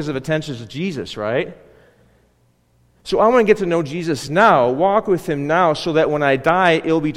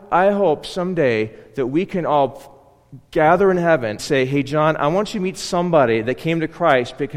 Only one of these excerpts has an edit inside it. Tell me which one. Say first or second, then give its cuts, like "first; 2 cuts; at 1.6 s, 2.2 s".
second; 1 cut; at 4.0 s